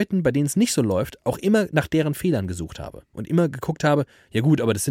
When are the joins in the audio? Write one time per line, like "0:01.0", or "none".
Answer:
none